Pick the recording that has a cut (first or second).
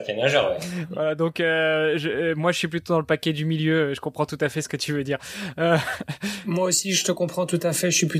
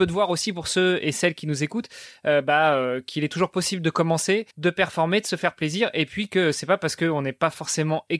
second